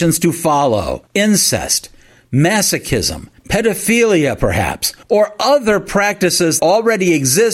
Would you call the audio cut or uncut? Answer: cut